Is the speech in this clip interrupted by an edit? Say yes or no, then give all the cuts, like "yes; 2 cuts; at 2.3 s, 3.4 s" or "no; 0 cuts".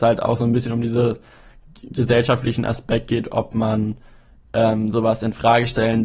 no; 0 cuts